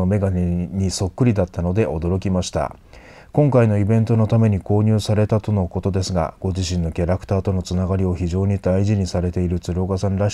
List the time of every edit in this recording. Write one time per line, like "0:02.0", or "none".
none